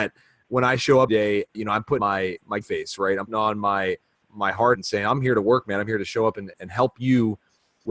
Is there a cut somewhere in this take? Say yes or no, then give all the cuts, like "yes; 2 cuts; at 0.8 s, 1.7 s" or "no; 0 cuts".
yes; 8 cuts; at 1.1 s, 1.5 s, 2.0 s, 2.6 s, 3.3 s, 4.2 s, 4.7 s, 6.5 s